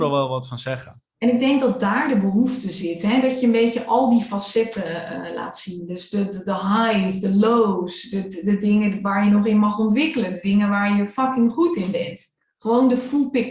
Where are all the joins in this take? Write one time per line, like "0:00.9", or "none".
none